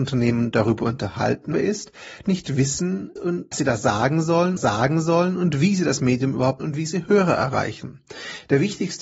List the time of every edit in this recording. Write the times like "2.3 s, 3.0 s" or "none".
1.5 s, 2.2 s, 3.2 s, 3.5 s, 4.6 s, 6.6 s